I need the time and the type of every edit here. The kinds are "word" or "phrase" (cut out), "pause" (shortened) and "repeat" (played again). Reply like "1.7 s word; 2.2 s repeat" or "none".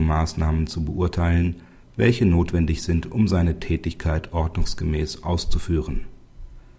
none